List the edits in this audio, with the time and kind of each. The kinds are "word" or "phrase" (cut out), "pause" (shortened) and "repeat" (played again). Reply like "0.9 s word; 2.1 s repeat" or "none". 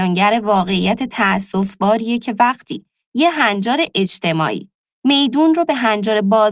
none

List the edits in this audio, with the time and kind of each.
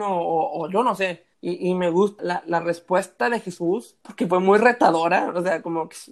1.3 s pause; 2.2 s word; 4.0 s pause

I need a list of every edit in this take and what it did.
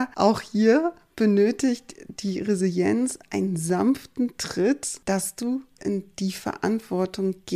5.8 s word

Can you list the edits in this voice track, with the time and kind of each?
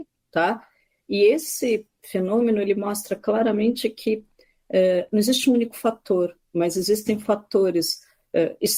1.9 s pause

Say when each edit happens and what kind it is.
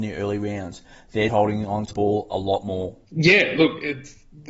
1.3 s word; 1.9 s word; 3.0 s pause

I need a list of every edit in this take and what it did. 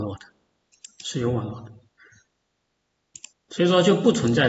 3.3 s pause

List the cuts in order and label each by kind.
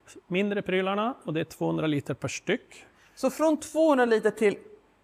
none

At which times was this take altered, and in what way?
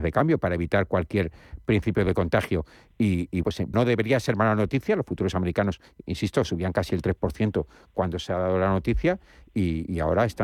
3.4 s word; 3.7 s word

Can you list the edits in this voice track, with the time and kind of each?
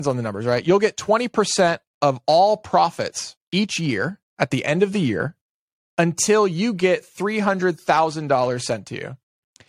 3.4 s pause

